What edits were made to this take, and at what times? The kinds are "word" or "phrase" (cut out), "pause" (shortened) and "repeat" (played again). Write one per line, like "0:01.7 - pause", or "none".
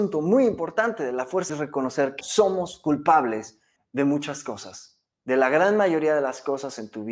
0:01.5 - word
0:02.2 - word
0:03.8 - pause